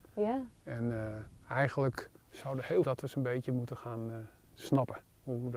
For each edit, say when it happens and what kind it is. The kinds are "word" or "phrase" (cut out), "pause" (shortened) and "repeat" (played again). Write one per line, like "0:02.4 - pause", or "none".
0:02.2 - pause
0:02.8 - phrase